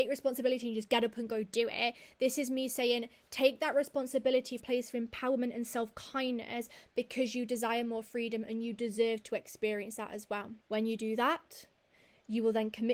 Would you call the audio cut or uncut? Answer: cut